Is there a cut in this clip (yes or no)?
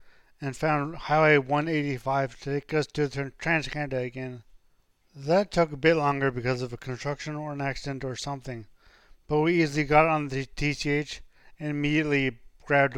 no